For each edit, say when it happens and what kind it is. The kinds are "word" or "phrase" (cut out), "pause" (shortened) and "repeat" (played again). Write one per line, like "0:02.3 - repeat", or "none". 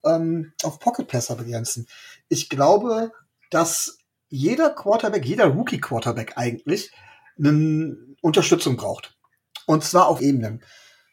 0:10.2 - word